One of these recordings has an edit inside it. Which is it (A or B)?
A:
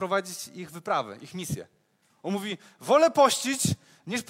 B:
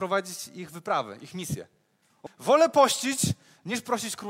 B